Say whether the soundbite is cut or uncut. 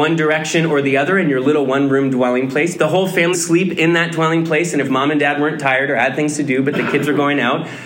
cut